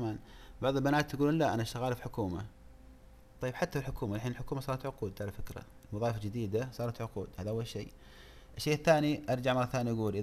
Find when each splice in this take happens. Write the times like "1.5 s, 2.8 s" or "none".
none